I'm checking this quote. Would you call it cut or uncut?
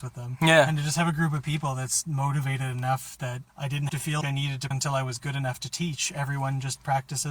cut